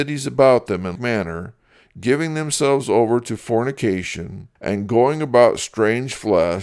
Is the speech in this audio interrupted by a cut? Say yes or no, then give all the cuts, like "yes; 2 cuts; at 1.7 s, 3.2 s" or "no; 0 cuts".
yes; 2 cuts; at 1.0 s, 4.6 s